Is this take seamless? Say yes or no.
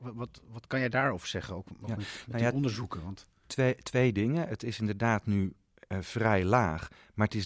yes